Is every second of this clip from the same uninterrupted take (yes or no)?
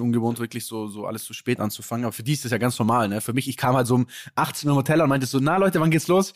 yes